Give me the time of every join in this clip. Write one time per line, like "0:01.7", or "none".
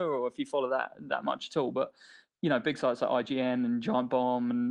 none

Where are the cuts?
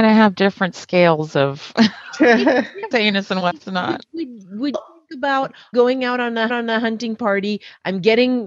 0:02.9
0:04.7
0:05.7
0:06.5

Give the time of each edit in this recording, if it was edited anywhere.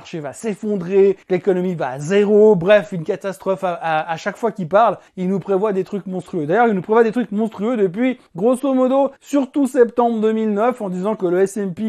0:01.2
0:05.1
0:08.3
0:09.2

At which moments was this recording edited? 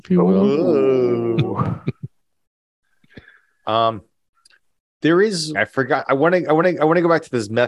0:02.1
0:05.5
0:06.6

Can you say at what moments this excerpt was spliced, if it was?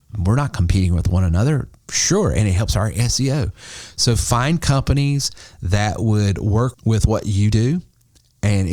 0:06.7

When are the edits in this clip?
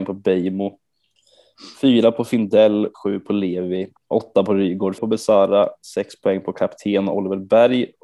0:02.9
0:04.0
0:05.0

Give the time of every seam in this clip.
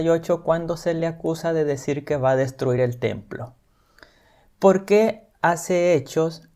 none

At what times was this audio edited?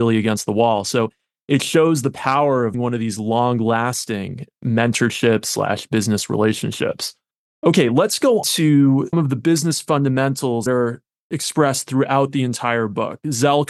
0:02.7
0:08.4
0:09.1
0:10.7

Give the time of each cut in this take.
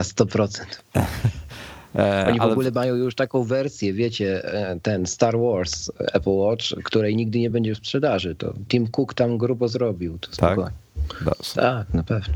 none

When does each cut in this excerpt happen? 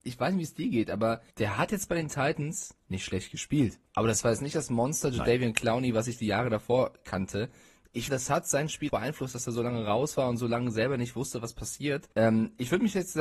0:01.3
0:02.8
0:03.9
0:08.1
0:08.9
0:12.1

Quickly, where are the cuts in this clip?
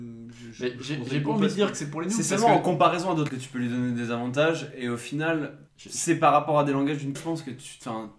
0:03.3
0:05.7
0:07.2

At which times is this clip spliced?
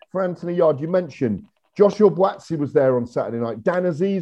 none

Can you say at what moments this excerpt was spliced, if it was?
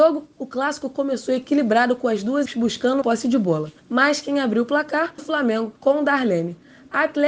0:02.5
0:03.0
0:03.8
0:05.2
0:05.8

